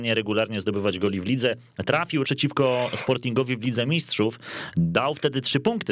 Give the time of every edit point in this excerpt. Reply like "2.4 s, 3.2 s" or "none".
2.2 s